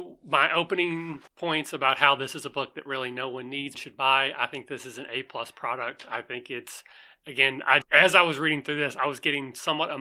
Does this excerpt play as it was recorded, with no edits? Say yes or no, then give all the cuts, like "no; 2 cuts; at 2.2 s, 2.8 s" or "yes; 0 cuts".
no; 3 cuts; at 1.3 s, 3.7 s, 7.8 s